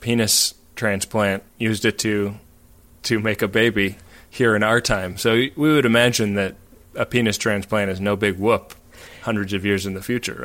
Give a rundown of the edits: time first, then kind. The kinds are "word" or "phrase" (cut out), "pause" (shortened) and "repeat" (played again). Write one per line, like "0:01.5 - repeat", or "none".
0:01.5 - pause